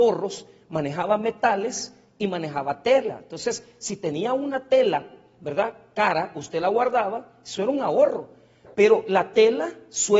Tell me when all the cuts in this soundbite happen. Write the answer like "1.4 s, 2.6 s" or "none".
none